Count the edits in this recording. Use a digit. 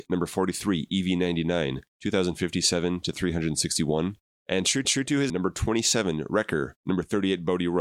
5